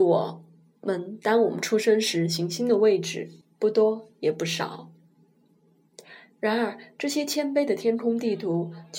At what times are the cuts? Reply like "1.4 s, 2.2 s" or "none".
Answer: 3.4 s